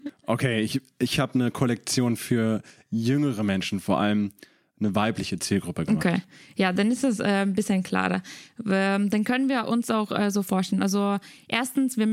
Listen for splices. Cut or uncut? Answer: uncut